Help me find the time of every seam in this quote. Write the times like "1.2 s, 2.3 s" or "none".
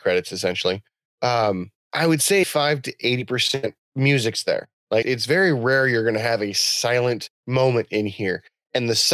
2.4 s, 5.0 s

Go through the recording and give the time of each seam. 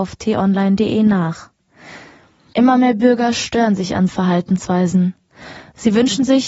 4.1 s

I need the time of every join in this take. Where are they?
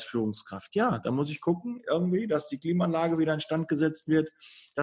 none

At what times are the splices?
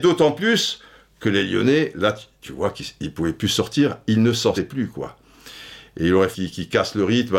4.5 s, 6.3 s

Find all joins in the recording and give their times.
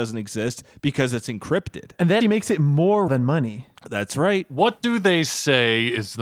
2.2 s, 3.1 s

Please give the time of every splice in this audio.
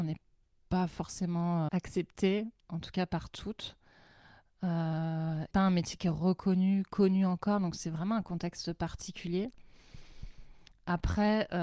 1.7 s, 5.5 s

